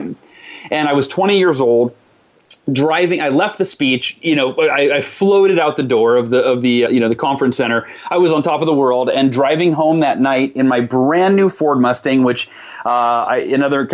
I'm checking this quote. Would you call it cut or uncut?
cut